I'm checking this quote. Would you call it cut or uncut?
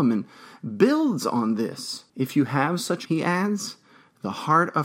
cut